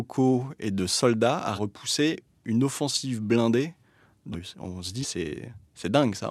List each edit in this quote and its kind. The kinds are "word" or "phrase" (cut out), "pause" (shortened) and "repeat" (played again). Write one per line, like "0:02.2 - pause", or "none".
0:01.6 - phrase
0:04.3 - word
0:05.0 - word